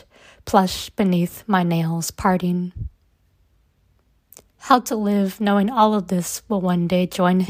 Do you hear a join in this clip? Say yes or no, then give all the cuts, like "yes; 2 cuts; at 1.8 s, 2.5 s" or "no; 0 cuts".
no; 0 cuts